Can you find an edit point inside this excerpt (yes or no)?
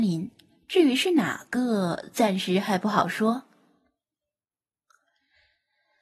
no